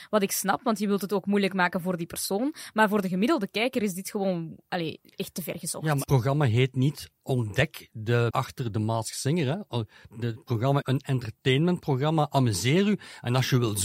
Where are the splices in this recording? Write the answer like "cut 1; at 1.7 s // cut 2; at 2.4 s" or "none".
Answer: cut 1; at 6.0 s // cut 2; at 8.3 s // cut 3; at 10.8 s